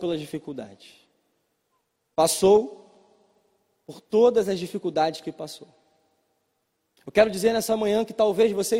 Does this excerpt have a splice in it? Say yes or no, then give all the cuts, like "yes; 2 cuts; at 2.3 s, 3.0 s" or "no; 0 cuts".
no; 0 cuts